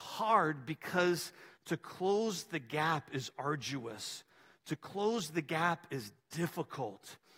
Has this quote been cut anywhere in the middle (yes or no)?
no